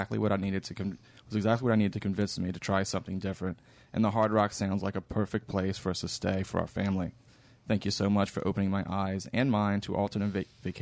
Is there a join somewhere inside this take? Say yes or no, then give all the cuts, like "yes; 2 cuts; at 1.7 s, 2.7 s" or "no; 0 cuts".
no; 0 cuts